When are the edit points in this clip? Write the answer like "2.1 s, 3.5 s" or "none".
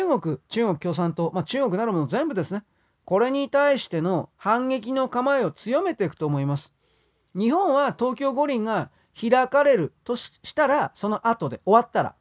none